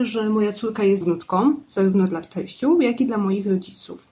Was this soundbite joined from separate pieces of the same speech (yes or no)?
yes